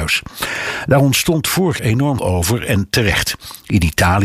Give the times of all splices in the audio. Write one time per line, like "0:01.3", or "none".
0:01.8
0:02.2